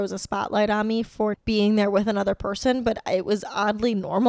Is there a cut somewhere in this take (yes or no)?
yes